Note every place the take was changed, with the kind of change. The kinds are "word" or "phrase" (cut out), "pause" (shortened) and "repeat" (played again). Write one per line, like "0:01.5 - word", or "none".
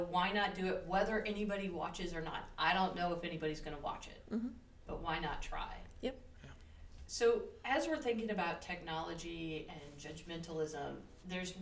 none